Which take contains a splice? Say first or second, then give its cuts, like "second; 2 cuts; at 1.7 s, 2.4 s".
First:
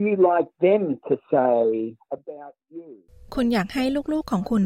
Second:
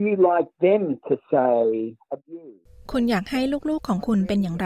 second; 1 cut; at 2.2 s